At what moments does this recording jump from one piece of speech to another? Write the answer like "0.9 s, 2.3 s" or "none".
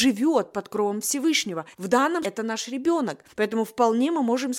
1.7 s, 2.2 s, 3.3 s